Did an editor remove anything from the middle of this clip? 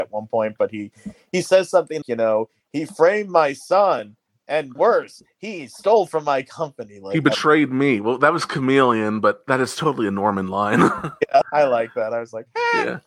yes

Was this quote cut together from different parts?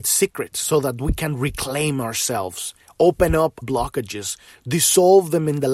yes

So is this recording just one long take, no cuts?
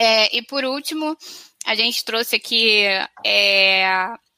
yes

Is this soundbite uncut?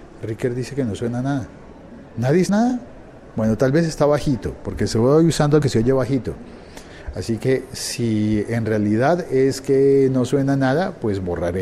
no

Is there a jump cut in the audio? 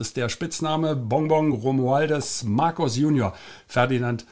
no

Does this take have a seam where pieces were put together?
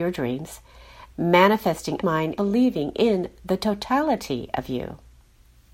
yes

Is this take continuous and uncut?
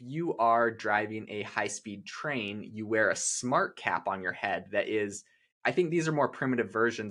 yes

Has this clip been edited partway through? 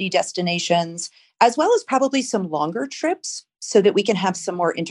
no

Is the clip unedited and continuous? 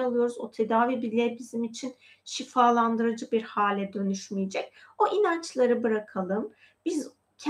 yes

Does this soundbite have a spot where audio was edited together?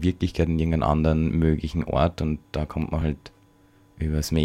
no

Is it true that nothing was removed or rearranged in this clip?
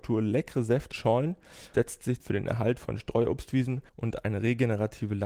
no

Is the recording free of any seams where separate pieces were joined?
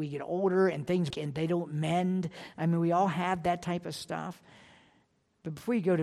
no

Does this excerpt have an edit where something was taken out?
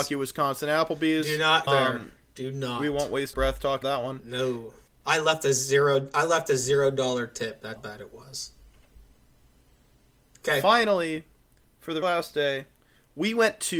yes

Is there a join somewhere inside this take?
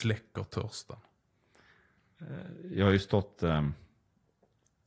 no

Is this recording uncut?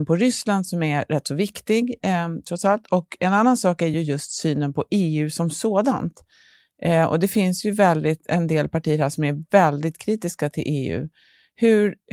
yes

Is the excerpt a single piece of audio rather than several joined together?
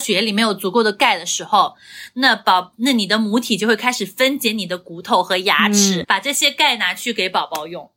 no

